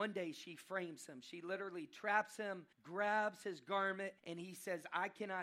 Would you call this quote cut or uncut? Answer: cut